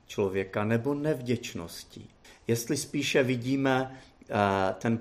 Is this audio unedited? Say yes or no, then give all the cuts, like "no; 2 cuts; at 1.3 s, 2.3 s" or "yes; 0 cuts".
no; 1 cut; at 2.2 s